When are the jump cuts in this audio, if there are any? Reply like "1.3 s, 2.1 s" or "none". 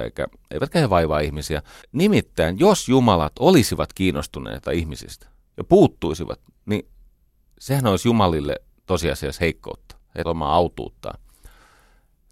1.8 s, 10.2 s